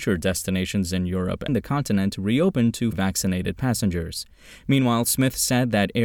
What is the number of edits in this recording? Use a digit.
2